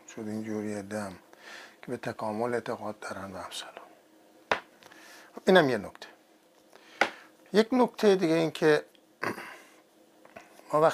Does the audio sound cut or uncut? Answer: uncut